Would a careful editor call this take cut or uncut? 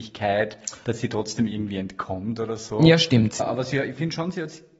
cut